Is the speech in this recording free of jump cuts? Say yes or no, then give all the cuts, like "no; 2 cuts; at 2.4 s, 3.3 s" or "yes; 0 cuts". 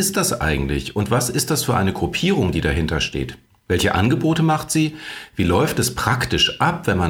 yes; 0 cuts